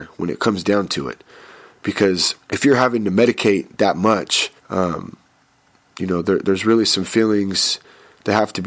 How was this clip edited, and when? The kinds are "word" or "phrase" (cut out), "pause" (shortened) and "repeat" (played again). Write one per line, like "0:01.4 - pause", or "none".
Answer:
0:02.4 - pause
0:04.6 - pause